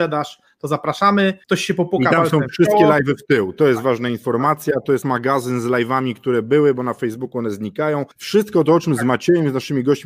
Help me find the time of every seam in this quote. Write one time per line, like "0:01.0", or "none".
0:01.4
0:05.0
0:08.1